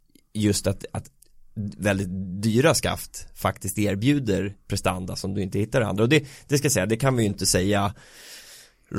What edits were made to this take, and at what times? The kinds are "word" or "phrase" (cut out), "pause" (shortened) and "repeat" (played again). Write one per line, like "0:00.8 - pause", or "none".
0:01.2 - pause